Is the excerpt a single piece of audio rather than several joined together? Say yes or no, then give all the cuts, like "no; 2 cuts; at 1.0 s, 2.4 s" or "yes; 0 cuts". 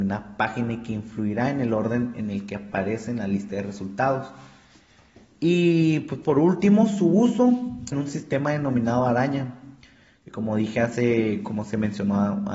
no; 1 cut; at 7.9 s